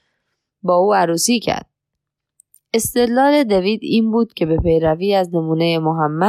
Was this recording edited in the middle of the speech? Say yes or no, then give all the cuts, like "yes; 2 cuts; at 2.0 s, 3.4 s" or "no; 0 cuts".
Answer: no; 0 cuts